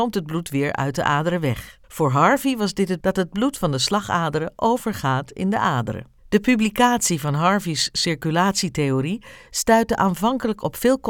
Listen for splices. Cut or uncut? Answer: cut